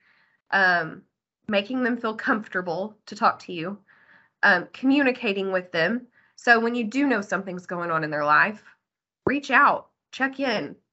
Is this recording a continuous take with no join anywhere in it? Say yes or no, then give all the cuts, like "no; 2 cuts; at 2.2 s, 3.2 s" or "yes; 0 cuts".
yes; 0 cuts